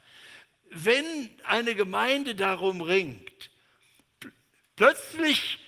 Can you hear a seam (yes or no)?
no